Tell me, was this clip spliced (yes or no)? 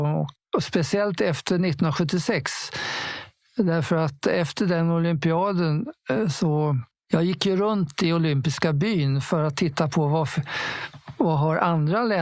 no